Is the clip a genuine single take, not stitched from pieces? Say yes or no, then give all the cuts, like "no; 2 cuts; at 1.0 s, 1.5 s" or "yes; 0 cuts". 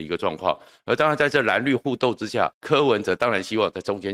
no; 1 cut; at 2.5 s